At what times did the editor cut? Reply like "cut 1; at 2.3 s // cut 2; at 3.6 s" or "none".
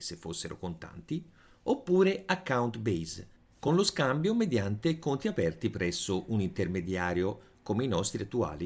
none